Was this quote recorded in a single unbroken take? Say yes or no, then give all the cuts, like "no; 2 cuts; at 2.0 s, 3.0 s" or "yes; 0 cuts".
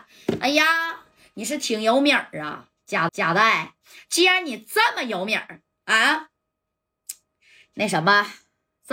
no; 1 cut; at 3.1 s